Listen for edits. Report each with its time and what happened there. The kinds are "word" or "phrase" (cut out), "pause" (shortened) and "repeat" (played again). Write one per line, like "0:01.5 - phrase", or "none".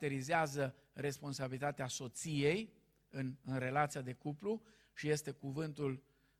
none